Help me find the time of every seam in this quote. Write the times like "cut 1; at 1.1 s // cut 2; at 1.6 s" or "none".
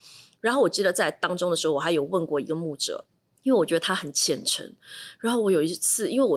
cut 1; at 3.1 s